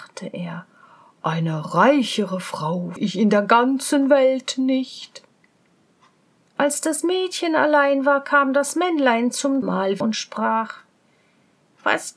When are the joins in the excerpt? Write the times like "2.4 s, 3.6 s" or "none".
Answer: 3.0 s, 9.6 s, 10.0 s